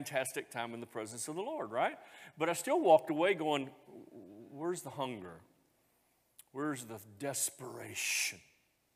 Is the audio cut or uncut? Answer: uncut